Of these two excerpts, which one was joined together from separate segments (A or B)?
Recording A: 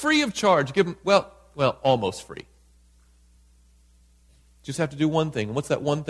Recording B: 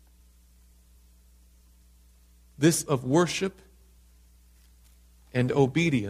B